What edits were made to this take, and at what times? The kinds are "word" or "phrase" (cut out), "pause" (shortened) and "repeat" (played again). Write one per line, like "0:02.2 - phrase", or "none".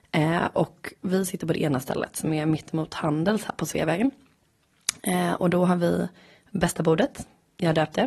none